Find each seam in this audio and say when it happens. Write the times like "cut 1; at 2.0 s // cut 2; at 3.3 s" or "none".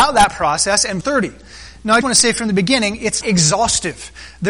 cut 1; at 1.0 s // cut 2; at 2.0 s // cut 3; at 3.2 s